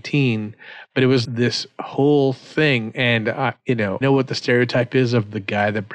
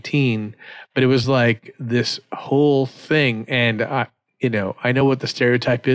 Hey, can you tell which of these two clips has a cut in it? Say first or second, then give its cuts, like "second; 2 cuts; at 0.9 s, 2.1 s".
first; 3 cuts; at 1.2 s, 3.6 s, 4.0 s